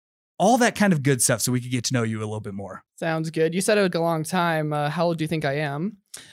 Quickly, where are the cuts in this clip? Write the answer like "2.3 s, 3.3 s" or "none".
2.9 s, 3.9 s